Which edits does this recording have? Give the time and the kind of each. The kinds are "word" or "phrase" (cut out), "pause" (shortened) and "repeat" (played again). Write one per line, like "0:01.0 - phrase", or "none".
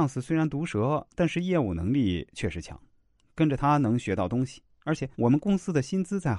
0:05.1 - pause